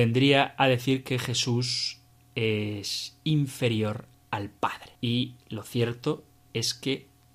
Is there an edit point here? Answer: yes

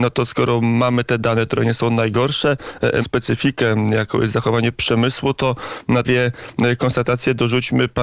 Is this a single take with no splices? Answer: no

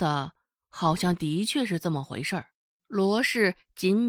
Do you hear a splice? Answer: yes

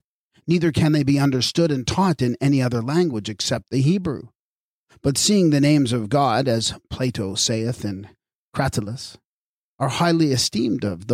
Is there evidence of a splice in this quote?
no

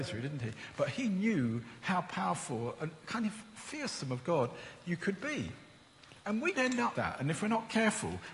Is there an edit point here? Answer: yes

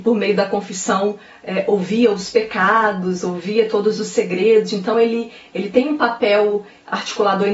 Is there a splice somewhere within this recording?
no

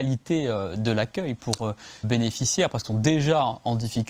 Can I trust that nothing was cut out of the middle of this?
no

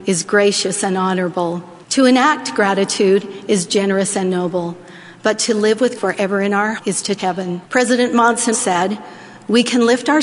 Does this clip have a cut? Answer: yes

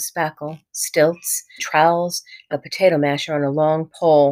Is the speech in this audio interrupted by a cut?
yes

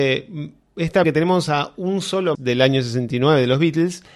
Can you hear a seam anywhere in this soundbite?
yes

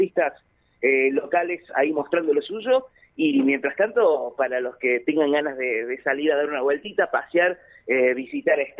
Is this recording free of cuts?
yes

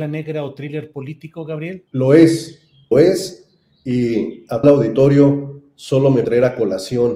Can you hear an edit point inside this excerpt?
yes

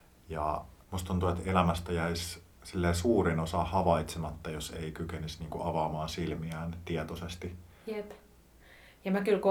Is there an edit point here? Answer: yes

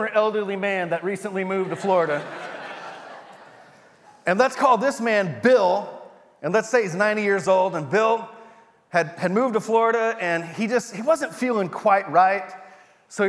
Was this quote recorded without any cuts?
yes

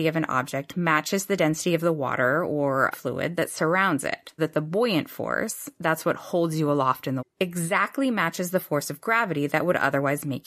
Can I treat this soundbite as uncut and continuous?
no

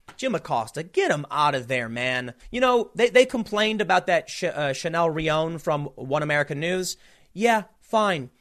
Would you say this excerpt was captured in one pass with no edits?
no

